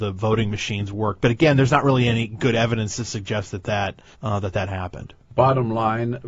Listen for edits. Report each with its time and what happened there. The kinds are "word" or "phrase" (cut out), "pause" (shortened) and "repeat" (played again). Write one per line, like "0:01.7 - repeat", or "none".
0:04.1 - pause